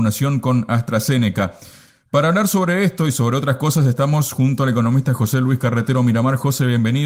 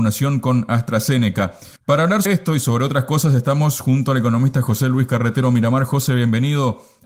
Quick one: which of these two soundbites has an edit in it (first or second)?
second